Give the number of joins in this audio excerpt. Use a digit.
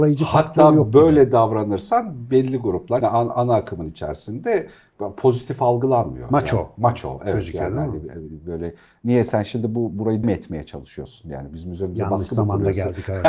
2